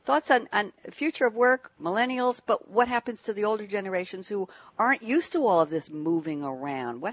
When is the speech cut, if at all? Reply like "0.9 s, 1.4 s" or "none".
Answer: none